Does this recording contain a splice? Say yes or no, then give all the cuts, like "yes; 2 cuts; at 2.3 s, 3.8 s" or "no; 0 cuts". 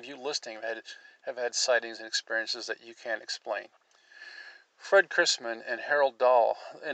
no; 0 cuts